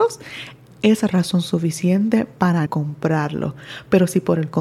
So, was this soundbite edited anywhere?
yes; 1 cut; at 2.7 s

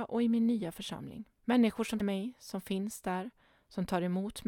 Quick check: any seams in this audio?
yes; 2 cuts; at 1.4 s, 2.0 s

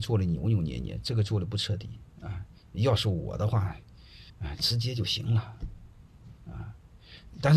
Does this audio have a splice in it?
yes; 3 cuts; at 2.1 s, 4.3 s, 6.4 s

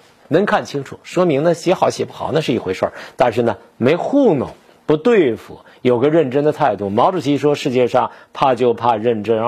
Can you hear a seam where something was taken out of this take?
no; 0 cuts

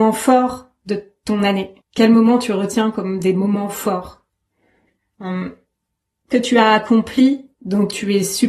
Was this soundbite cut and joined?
yes; 3 cuts; at 1.8 s, 6.3 s, 7.5 s

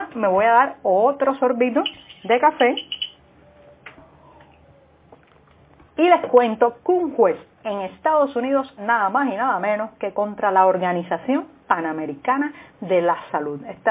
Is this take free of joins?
no; 1 cut; at 8.8 s

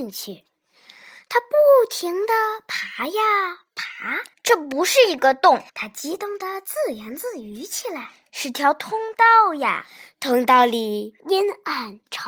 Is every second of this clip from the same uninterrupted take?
no; 3 cuts; at 4.3 s, 5.7 s, 11.2 s

